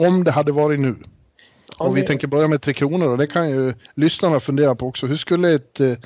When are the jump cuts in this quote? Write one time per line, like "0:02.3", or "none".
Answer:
none